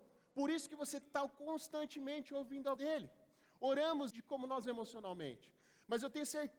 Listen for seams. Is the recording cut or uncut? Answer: cut